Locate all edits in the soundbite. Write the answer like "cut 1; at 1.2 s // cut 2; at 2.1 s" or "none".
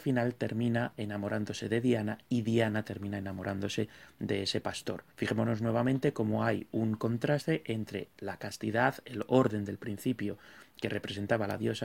cut 1; at 5.1 s